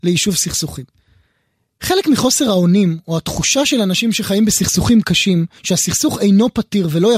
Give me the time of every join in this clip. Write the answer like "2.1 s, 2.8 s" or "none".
5.6 s